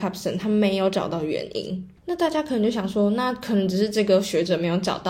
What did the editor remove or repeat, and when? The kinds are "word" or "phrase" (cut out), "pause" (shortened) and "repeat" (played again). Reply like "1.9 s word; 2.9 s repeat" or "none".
2.0 s pause